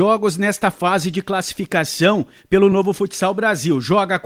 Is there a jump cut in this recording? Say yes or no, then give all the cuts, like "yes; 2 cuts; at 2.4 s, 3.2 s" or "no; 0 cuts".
no; 0 cuts